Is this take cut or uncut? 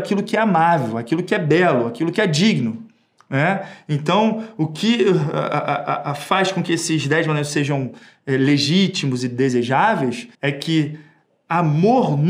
cut